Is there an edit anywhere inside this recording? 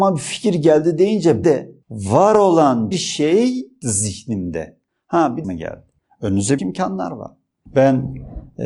yes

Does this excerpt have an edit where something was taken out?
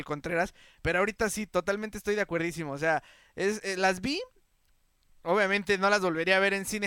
no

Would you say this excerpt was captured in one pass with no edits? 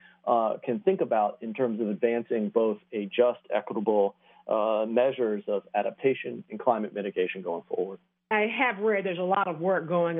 yes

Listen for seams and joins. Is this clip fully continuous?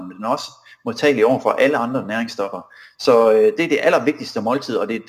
yes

